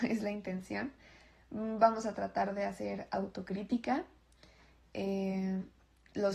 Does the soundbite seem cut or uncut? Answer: uncut